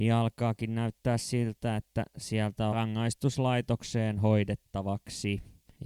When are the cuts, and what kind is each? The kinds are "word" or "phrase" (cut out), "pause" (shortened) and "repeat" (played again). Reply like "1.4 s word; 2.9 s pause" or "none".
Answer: 2.7 s phrase